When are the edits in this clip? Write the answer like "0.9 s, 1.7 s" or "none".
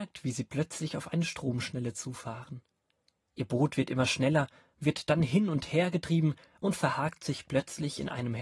none